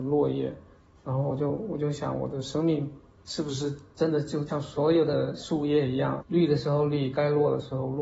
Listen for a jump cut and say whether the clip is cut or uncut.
uncut